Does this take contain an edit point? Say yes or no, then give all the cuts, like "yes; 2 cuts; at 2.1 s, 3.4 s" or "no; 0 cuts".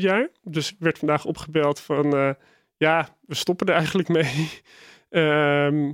no; 0 cuts